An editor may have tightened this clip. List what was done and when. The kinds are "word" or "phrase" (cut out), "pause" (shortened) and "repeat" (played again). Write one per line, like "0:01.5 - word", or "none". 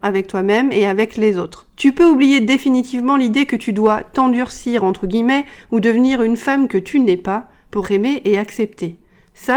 0:01.7 - pause
0:07.8 - word